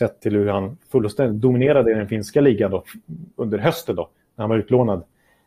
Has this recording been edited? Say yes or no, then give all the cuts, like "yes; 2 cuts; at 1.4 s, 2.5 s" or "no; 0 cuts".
no; 0 cuts